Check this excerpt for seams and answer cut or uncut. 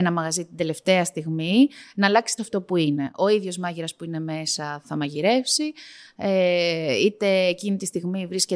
cut